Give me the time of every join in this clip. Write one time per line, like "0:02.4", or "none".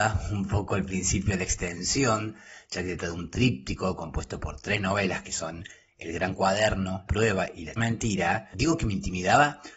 0:03.0
0:07.1
0:07.8

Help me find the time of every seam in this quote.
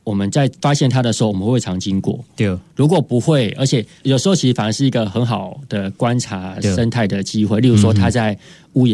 none

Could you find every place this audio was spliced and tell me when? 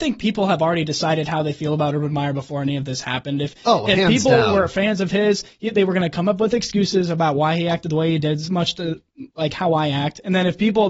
0:09.3

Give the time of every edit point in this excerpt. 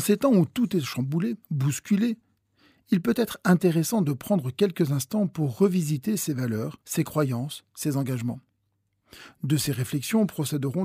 0:01.4
0:06.8

